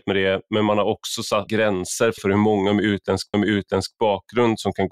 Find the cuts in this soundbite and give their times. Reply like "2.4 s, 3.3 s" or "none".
1.5 s, 2.2 s, 3.3 s